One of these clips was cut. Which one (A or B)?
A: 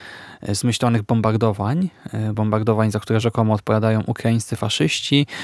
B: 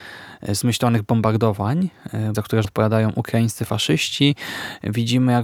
B